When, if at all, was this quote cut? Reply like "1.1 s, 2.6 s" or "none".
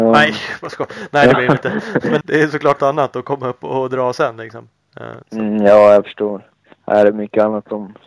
2.2 s, 2.8 s, 5.2 s, 6.7 s